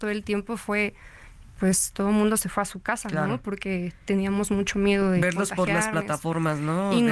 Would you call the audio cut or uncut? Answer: uncut